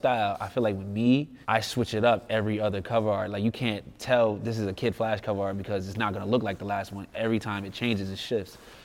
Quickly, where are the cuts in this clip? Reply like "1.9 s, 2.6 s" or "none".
1.4 s